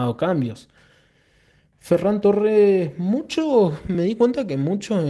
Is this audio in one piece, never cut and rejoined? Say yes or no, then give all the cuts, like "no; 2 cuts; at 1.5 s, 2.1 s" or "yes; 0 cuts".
yes; 0 cuts